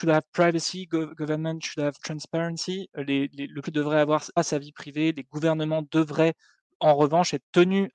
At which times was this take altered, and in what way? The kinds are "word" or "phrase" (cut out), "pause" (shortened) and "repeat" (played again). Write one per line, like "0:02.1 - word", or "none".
0:03.6 - word
0:04.4 - word